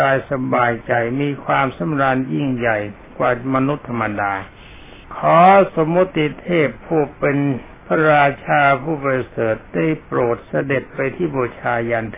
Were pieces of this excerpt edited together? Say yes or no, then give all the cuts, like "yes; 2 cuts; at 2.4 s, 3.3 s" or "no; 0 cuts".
yes; 2 cuts; at 5.0 s, 7.8 s